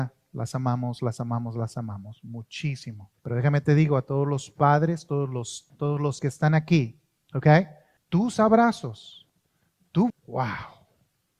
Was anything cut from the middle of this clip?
yes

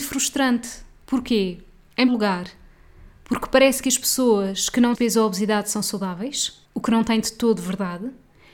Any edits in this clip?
yes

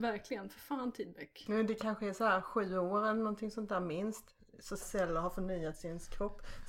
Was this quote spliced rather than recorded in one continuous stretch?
yes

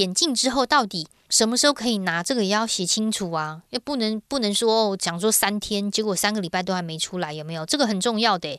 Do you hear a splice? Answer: no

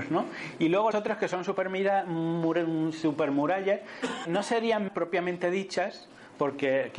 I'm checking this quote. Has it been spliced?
yes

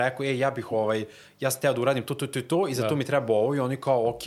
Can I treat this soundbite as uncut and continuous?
yes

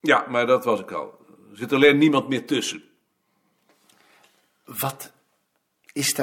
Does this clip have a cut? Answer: no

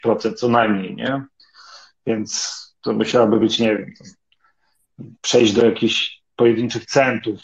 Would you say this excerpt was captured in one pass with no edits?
yes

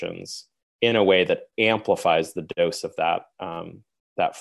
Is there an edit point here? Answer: no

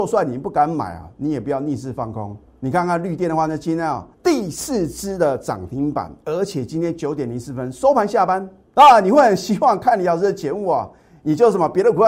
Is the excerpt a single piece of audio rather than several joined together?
no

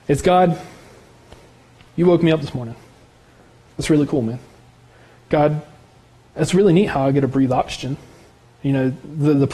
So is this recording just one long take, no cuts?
yes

